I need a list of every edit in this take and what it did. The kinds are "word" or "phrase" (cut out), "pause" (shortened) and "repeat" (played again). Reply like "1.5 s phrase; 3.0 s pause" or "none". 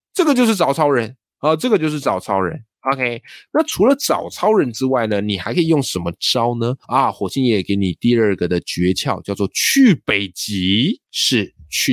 3.5 s word; 6.8 s pause; 11.0 s pause